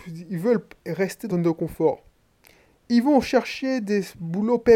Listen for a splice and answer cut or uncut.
cut